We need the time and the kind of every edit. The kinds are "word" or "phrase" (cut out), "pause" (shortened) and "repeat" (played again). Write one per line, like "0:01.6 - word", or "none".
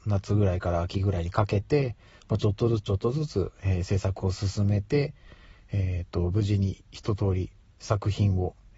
none